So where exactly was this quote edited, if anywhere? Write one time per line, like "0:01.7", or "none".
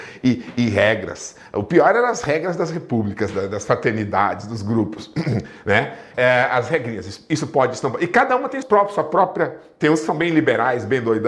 0:06.1
0:08.6